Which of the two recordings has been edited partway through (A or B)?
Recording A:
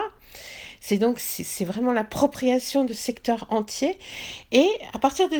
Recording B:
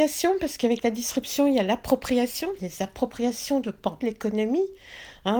B